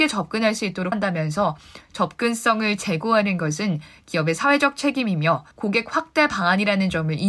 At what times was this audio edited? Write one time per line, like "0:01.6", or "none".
0:00.9
0:05.5